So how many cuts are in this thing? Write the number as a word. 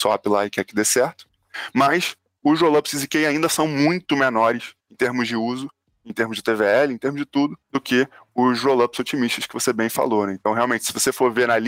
two